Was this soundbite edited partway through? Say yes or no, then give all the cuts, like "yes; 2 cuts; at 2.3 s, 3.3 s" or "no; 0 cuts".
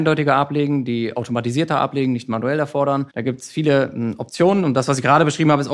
yes; 1 cut; at 3.1 s